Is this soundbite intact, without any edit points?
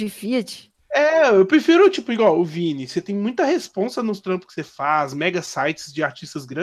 yes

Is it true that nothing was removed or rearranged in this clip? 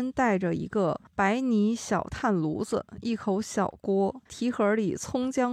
no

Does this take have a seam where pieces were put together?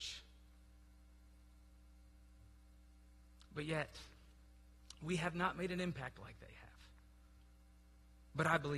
no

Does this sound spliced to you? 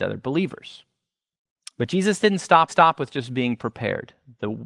yes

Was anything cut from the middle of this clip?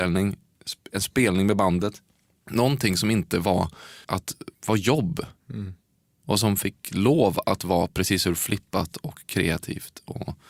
yes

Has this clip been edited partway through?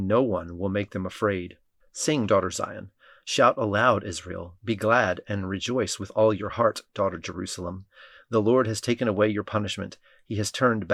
no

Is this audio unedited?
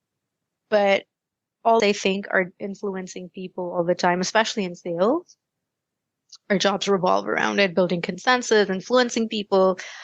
no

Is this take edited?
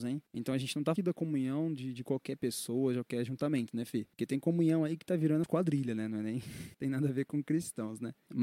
yes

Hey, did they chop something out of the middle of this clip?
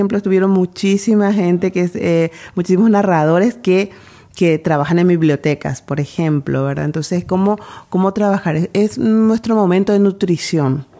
no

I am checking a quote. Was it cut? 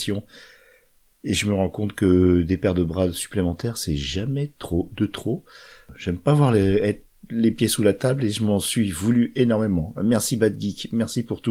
no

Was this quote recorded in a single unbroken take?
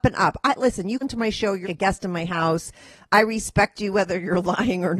no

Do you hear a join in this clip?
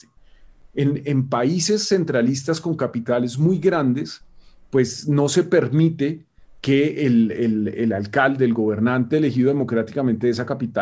no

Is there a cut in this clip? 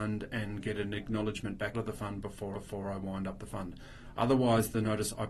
yes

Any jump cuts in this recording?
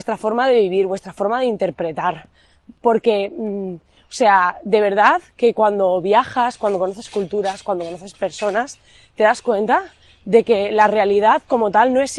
no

